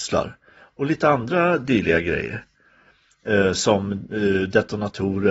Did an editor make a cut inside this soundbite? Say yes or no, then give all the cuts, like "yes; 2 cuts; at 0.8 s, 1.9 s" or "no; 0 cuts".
no; 0 cuts